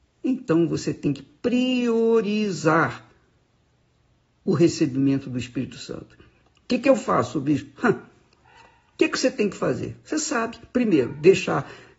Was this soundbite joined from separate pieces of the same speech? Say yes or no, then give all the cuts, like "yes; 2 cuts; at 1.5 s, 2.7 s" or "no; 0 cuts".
no; 0 cuts